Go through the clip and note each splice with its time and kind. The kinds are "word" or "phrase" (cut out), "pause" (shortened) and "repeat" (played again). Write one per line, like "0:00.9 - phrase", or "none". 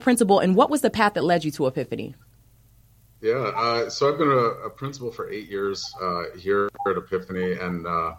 none